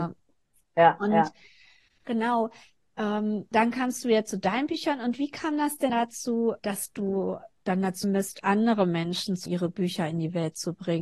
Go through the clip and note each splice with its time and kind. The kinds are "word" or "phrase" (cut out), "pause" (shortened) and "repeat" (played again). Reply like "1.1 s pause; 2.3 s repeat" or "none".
3.5 s word; 5.9 s word; 6.6 s word; 7.6 s word; 8.0 s word; 9.5 s word